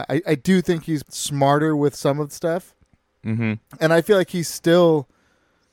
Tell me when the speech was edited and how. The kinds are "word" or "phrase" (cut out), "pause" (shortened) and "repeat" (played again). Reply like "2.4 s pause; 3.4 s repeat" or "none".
1.0 s word; 2.3 s word